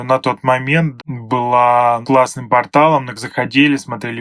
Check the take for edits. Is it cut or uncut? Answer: cut